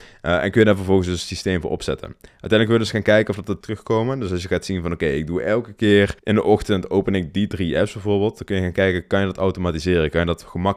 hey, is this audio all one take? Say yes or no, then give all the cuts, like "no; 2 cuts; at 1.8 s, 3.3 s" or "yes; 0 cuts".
no; 2 cuts; at 3.6 s, 6.2 s